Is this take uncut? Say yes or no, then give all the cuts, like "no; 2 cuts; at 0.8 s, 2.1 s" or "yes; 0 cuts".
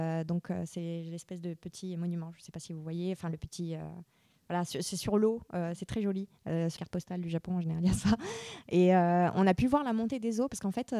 no; 1 cut; at 6.8 s